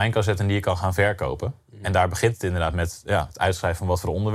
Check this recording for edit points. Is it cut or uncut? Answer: uncut